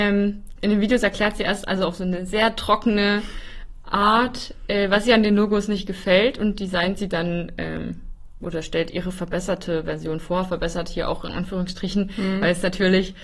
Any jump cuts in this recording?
no; 0 cuts

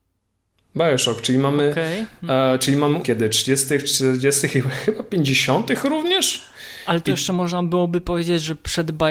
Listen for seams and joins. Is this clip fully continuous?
no; 1 cut; at 3.0 s

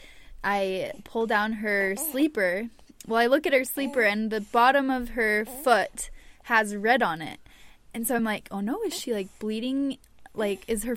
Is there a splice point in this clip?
no; 0 cuts

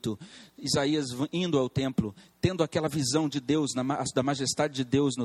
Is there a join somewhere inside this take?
no; 0 cuts

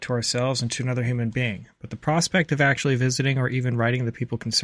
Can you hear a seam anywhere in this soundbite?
no; 0 cuts

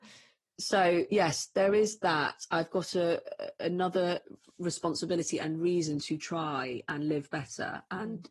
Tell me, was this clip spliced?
no; 0 cuts

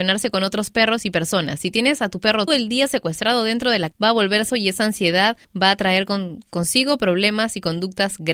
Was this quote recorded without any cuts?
no; 4 cuts; at 2.5 s, 3.9 s, 4.5 s, 5.4 s

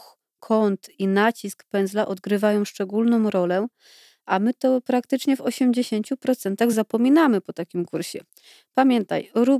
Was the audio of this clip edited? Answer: no; 0 cuts

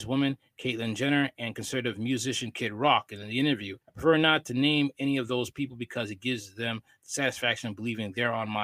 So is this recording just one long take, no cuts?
no; 1 cut; at 3.8 s

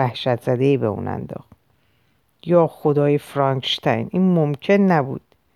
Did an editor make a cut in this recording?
no; 0 cuts

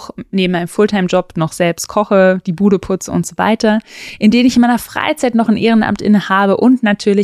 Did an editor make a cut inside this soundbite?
no; 0 cuts

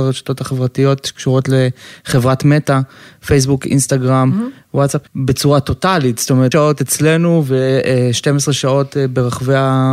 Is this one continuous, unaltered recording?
no; 2 cuts; at 5.1 s, 6.5 s

